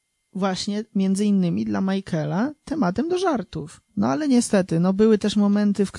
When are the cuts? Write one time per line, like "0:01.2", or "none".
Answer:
0:03.9